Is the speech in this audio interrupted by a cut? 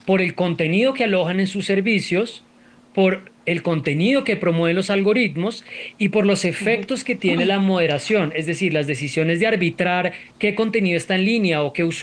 yes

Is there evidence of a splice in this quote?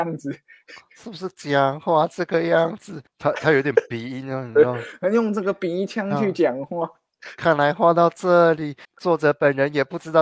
yes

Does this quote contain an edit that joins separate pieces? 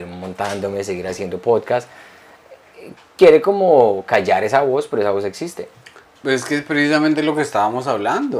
no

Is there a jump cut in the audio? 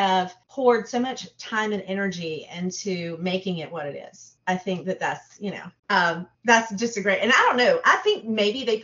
no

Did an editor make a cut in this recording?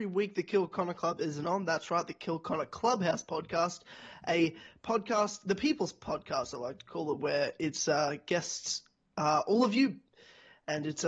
no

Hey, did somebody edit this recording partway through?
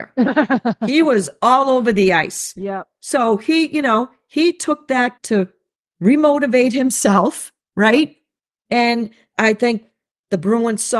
yes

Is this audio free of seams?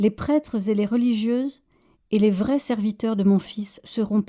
yes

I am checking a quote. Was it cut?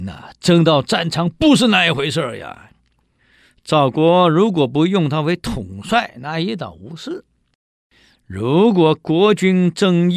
no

